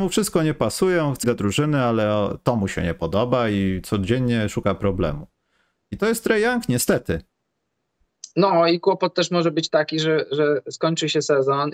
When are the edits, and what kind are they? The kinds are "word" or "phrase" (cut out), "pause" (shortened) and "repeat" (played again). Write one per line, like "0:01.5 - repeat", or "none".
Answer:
0:01.2 - phrase